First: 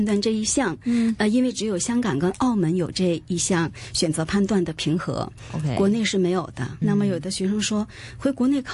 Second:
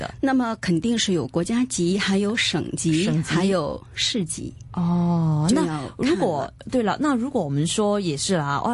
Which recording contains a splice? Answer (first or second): first